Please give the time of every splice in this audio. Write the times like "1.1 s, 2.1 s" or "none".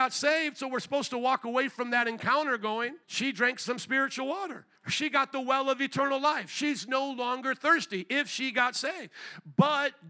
3.0 s, 4.8 s